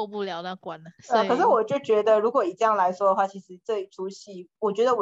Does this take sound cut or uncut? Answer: cut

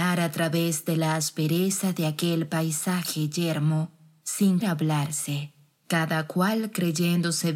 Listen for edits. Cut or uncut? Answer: cut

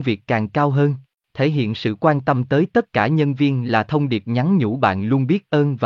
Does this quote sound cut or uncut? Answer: cut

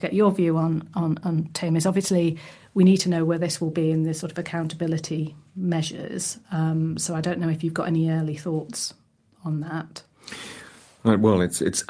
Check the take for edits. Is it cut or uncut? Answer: uncut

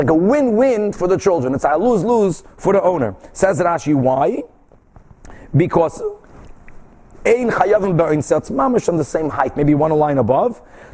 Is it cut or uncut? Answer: uncut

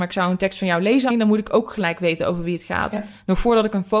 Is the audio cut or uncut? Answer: cut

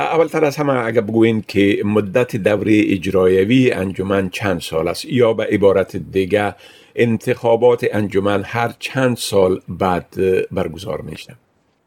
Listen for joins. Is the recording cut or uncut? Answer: uncut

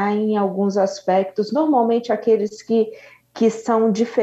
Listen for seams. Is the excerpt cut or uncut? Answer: uncut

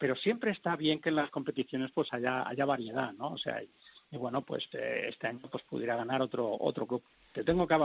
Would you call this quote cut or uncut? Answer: cut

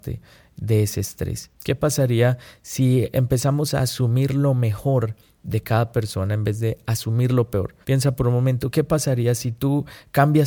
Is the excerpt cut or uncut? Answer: cut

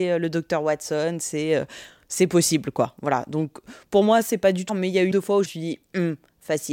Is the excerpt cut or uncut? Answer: cut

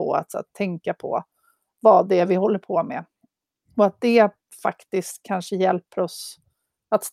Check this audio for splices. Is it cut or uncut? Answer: uncut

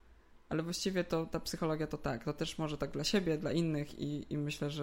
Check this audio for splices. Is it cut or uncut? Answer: uncut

